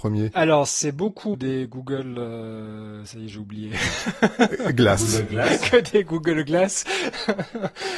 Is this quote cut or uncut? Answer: cut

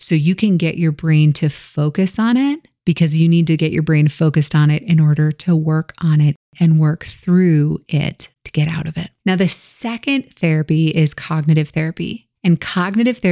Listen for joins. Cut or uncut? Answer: cut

